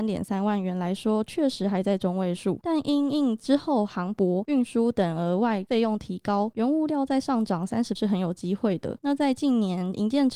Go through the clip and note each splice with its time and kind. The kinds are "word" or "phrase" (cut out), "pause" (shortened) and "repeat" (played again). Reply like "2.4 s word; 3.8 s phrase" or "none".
8.0 s word